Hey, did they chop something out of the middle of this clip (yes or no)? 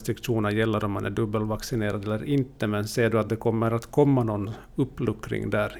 no